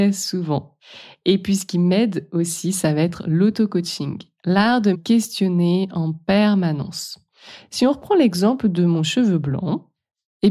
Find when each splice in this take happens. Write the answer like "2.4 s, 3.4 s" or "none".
4.9 s